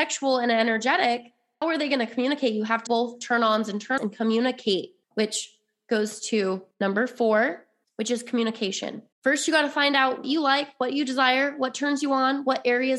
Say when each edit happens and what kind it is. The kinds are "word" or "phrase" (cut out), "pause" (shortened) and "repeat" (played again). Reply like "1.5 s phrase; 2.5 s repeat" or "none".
1.6 s word; 2.9 s word; 4.0 s word; 5.0 s pause; 6.7 s pause; 7.8 s pause; 9.1 s pause; 10.2 s word